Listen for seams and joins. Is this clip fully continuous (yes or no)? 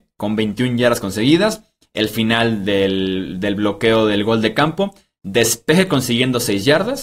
yes